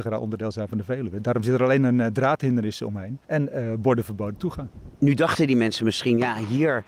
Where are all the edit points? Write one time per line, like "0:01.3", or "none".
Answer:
0:03.2